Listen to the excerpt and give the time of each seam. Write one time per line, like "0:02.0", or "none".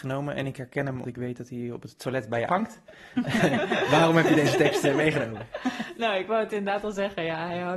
0:01.0
0:02.5